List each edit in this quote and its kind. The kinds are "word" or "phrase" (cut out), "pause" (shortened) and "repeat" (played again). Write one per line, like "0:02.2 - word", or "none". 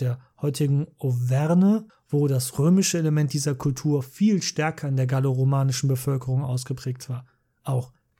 0:01.9 - pause